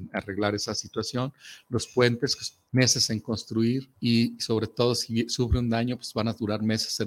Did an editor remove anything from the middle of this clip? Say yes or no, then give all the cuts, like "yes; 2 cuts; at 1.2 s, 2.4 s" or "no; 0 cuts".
yes; 2 cuts; at 2.6 s, 3.9 s